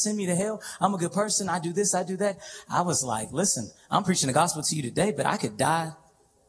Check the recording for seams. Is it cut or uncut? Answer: uncut